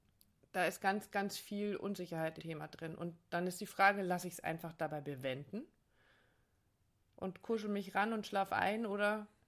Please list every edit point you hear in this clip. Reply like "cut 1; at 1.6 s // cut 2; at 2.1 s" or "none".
cut 1; at 2.4 s